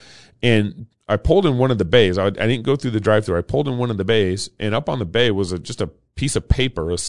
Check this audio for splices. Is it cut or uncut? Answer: uncut